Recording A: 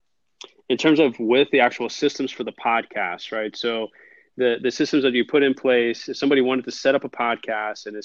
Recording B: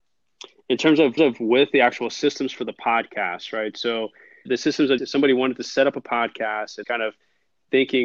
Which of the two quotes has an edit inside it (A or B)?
B